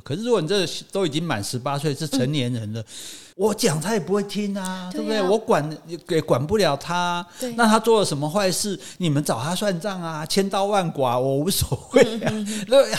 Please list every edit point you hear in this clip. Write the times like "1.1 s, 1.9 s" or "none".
3.3 s